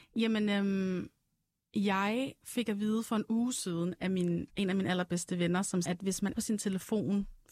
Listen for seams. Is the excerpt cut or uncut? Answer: cut